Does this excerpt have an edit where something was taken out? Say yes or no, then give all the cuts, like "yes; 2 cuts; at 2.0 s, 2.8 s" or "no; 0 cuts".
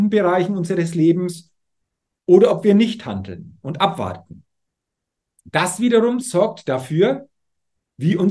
no; 0 cuts